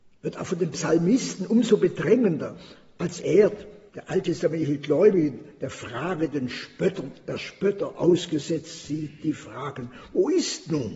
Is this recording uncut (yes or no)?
no